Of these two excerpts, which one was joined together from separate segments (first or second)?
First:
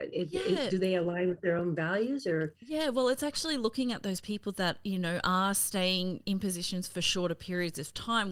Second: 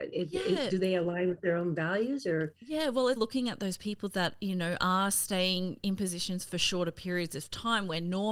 second